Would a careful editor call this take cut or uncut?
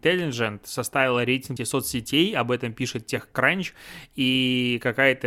cut